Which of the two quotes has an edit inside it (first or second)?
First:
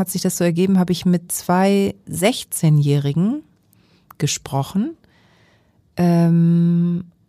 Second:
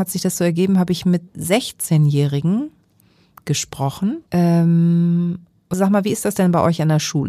second